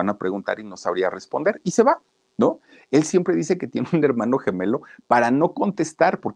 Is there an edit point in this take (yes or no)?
no